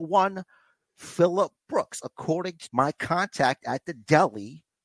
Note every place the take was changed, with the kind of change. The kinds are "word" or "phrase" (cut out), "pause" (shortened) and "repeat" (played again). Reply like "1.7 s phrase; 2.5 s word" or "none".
2.6 s word